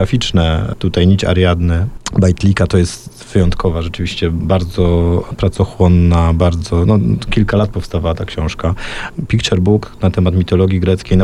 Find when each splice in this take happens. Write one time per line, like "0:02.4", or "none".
none